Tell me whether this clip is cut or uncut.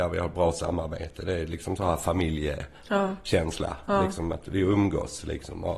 uncut